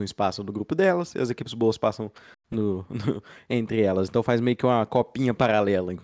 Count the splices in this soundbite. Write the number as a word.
zero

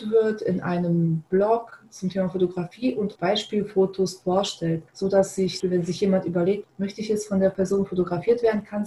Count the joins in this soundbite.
three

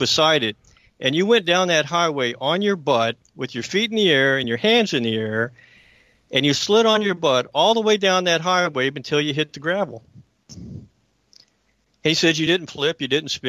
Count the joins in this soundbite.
zero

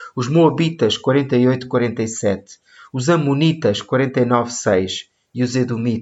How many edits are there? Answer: zero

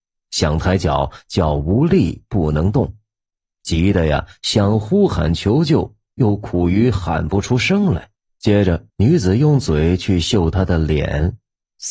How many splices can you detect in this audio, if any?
two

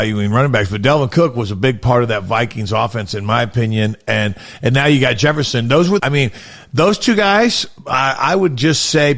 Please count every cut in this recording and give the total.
one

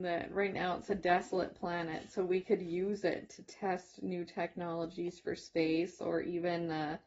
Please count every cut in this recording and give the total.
zero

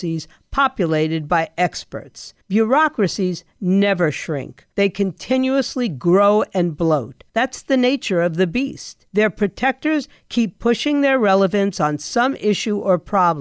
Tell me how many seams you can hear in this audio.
four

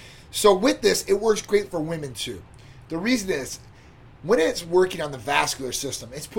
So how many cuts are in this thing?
zero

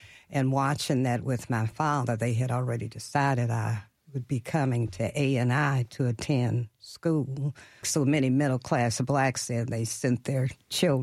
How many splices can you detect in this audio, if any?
one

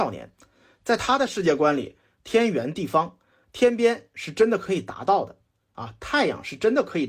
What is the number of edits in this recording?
zero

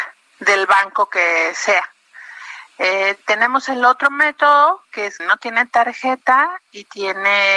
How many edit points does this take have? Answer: one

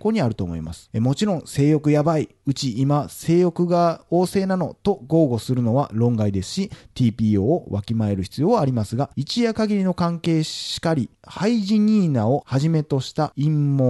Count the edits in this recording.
one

